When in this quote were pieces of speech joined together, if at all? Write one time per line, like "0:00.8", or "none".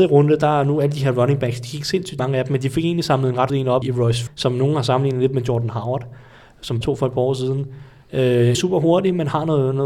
0:02.2
0:03.5
0:03.8
0:04.3
0:06.8
0:08.5